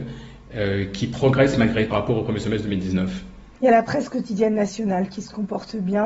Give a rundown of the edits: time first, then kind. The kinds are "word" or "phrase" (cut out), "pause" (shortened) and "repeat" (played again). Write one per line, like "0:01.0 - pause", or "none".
0:01.9 - phrase